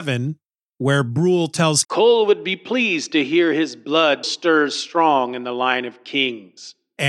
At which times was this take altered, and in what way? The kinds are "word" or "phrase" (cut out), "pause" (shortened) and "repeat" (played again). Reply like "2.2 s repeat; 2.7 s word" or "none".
1.8 s word; 4.2 s word